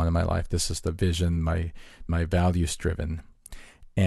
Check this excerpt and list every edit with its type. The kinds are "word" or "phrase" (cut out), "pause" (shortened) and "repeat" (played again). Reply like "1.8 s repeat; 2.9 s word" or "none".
2.1 s word